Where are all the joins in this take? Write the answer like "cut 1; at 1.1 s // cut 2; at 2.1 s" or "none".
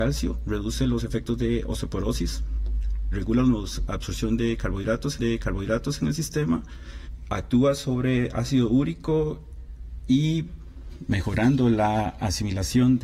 cut 1; at 5.2 s